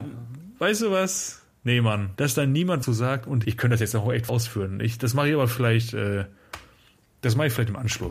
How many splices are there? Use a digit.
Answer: 4